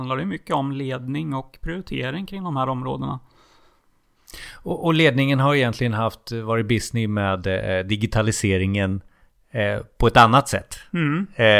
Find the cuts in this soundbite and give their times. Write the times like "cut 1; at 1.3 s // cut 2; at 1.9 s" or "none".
none

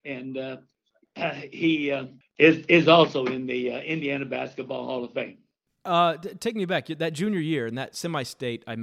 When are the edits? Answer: none

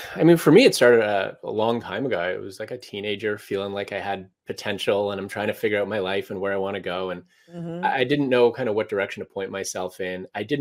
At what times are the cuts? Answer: none

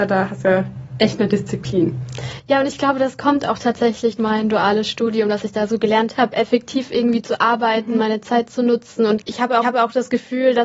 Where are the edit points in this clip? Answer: cut 1; at 4.2 s // cut 2; at 9.6 s

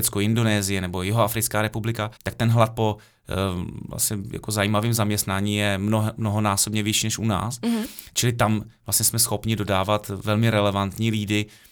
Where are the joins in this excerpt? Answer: cut 1; at 2.2 s

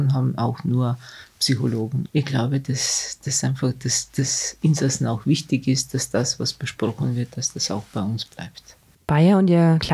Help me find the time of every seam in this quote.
none

